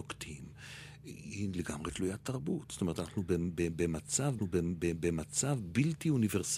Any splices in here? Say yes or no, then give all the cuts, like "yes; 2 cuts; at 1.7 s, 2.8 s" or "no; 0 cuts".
yes; 1 cut; at 4.4 s